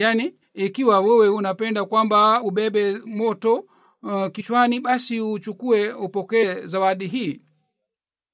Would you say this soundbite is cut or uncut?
uncut